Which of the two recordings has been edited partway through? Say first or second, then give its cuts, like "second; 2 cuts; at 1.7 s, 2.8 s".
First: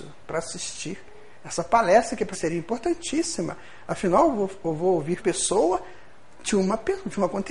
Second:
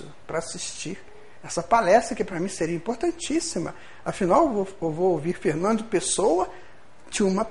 first; 2 cuts; at 2.3 s, 5.2 s